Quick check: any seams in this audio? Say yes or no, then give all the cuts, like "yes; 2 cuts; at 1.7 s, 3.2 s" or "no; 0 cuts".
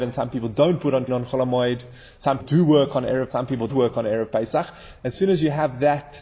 yes; 4 cuts; at 1.1 s, 2.4 s, 3.3 s, 3.7 s